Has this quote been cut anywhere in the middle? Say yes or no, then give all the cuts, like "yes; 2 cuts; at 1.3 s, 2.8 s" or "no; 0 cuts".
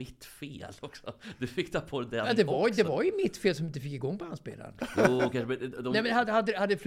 no; 0 cuts